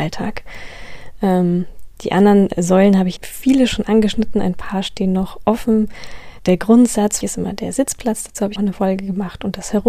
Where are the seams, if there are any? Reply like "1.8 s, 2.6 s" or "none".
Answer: 3.2 s, 6.4 s, 7.2 s, 8.6 s